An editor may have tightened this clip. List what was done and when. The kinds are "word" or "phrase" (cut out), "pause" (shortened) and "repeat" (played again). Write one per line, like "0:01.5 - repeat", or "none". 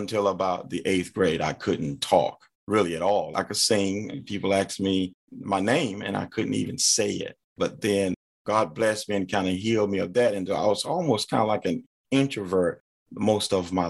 0:02.5 - pause
0:07.4 - pause